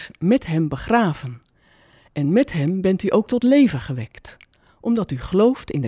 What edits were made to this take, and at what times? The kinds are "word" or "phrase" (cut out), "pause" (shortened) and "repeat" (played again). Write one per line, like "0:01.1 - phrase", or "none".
none

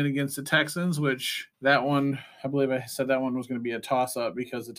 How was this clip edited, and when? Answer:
0:01.5 - pause

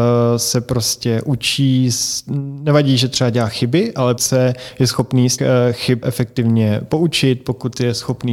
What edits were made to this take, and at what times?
0:04.2 - word
0:05.4 - word
0:06.0 - word

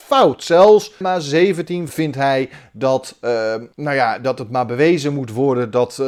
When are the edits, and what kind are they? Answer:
0:01.0 - word
0:01.9 - word
0:03.7 - pause

